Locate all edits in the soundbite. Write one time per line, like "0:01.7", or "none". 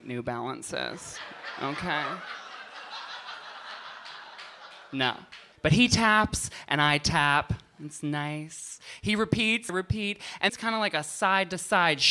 0:05.5
0:09.7
0:10.5